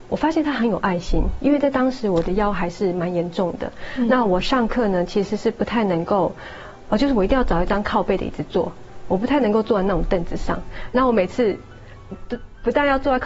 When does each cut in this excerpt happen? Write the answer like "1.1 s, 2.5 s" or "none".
12.1 s